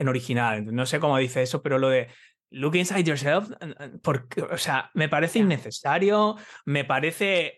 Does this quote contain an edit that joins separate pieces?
no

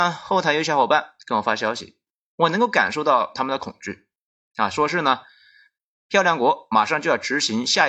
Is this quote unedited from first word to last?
yes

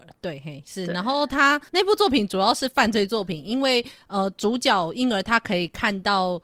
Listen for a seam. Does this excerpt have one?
yes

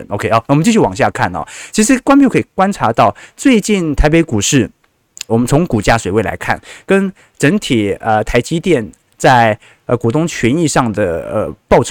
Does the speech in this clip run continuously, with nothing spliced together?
no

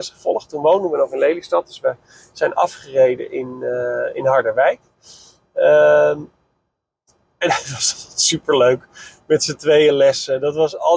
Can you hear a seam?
no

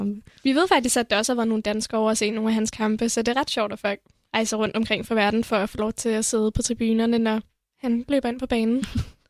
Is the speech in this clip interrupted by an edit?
no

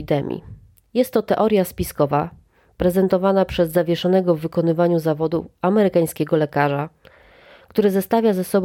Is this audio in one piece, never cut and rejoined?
yes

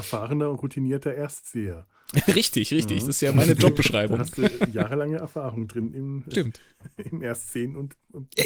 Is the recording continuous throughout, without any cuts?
no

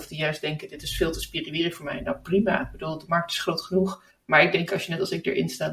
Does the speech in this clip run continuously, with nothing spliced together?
no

